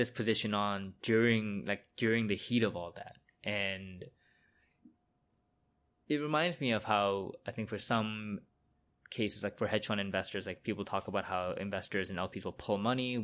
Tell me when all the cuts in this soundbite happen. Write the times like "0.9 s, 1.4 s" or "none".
none